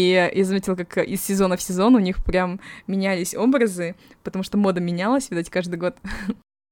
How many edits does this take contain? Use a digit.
0